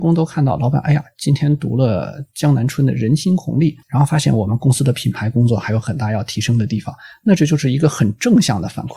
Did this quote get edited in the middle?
yes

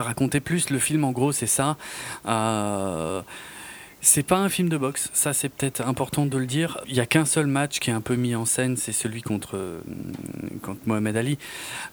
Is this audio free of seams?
no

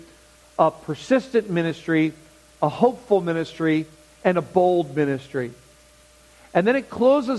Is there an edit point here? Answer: no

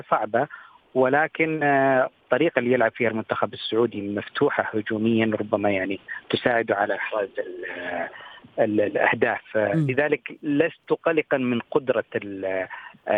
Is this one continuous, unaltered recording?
yes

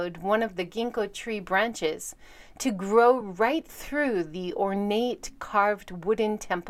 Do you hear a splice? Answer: no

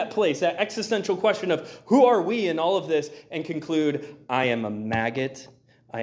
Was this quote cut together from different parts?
no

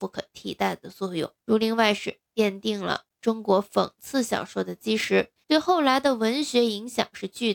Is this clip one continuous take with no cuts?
no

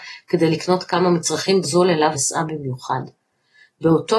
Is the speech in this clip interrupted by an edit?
yes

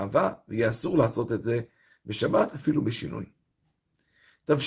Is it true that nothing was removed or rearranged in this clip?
yes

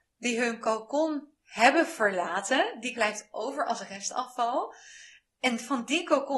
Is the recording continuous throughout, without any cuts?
no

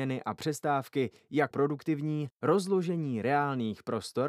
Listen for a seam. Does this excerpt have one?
yes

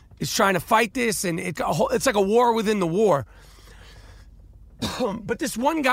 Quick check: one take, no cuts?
no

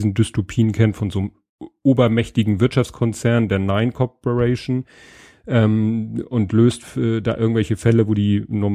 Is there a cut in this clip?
no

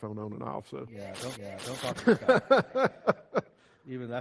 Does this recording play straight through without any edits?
no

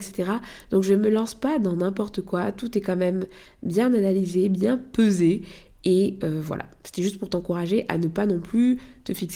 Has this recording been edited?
no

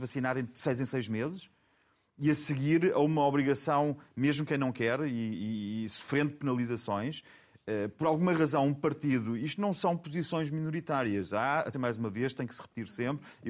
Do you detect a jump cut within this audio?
yes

